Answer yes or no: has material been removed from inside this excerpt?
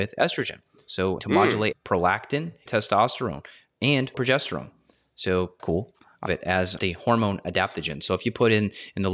yes